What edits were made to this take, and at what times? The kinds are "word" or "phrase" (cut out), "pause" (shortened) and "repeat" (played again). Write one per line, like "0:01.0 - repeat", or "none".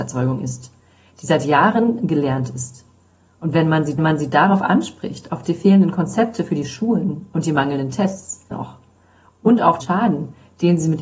0:04.0 - repeat
0:08.5 - word
0:09.8 - phrase